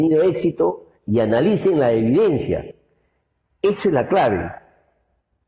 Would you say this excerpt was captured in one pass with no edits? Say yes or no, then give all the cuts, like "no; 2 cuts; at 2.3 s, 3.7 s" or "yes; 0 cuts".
no; 1 cut; at 1.0 s